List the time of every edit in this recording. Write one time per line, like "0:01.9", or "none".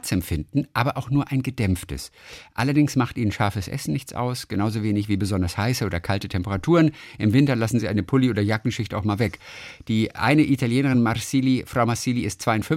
none